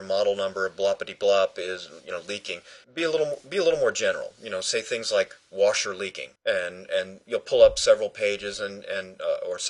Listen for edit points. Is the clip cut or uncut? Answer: cut